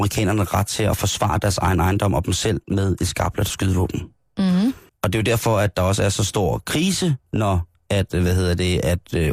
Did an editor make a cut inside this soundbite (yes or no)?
yes